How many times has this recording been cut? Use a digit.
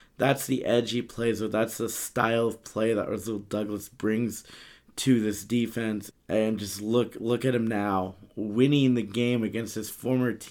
1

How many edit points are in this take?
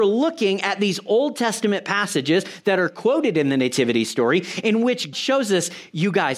1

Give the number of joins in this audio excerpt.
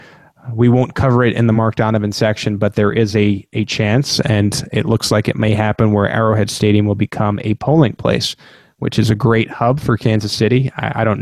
0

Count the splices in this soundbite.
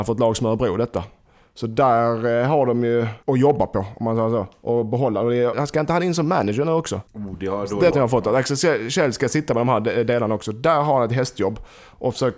4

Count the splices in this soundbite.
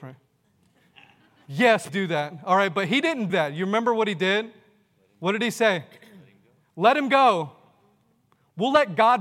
2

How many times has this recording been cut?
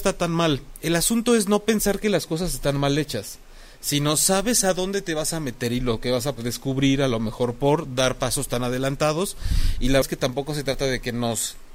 2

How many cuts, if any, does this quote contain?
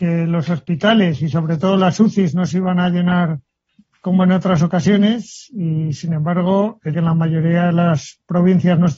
1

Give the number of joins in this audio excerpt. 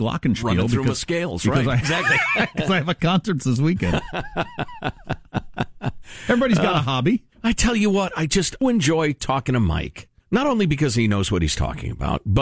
4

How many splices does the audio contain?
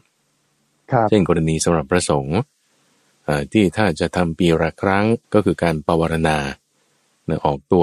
1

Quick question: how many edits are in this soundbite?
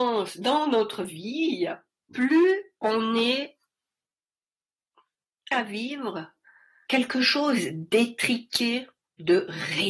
2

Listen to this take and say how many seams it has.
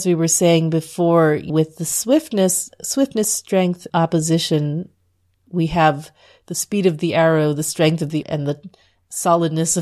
3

